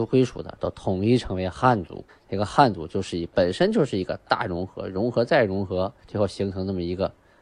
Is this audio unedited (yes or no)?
no